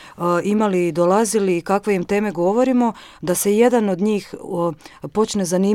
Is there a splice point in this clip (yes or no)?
no